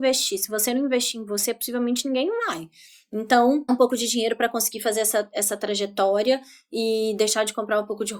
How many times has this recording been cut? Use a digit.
1